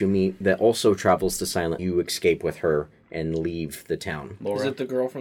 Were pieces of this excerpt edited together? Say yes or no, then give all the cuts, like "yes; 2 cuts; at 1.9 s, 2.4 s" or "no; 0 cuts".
yes; 1 cut; at 1.8 s